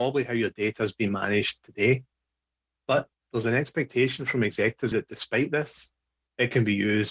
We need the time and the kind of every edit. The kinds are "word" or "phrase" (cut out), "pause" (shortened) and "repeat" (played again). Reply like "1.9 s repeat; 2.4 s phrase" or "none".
4.9 s phrase